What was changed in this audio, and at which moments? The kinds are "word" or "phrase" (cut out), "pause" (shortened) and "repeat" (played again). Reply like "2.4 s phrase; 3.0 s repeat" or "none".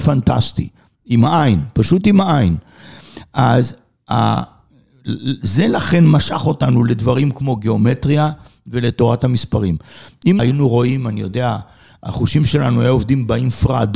10.4 s word